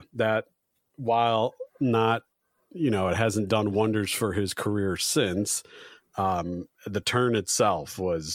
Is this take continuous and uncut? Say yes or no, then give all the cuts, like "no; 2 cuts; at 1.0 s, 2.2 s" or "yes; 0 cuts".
yes; 0 cuts